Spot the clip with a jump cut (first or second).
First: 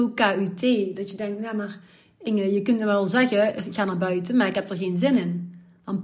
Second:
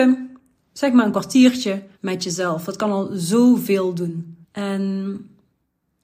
second